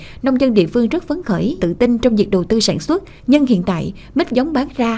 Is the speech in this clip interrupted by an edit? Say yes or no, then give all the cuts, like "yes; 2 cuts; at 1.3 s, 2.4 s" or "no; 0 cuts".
yes; 2 cuts; at 1.6 s, 3.2 s